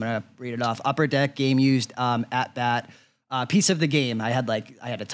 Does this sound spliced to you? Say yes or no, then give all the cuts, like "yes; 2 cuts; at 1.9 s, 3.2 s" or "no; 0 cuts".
no; 0 cuts